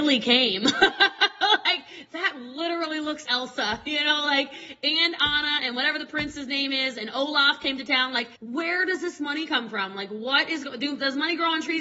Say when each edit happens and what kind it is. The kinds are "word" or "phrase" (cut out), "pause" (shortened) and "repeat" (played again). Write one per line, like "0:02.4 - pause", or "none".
0:03.3 - word
0:08.4 - pause